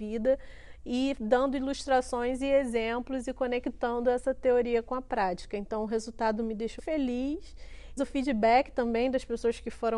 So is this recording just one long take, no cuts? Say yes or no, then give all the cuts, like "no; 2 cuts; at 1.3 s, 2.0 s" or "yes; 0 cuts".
no; 2 cuts; at 6.8 s, 8.0 s